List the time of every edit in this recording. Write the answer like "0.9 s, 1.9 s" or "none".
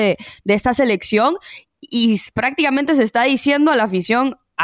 none